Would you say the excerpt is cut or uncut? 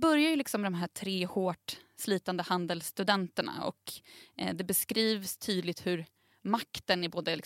uncut